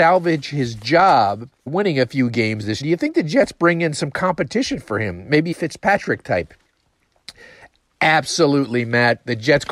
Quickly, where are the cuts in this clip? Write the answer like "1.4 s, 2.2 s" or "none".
1.7 s, 2.8 s, 5.5 s